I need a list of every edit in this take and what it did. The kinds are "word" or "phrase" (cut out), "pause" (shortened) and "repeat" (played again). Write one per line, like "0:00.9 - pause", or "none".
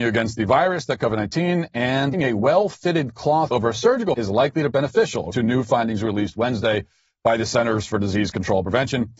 0:01.0 - word
0:02.1 - word
0:03.5 - word
0:04.1 - word
0:04.7 - word
0:05.3 - word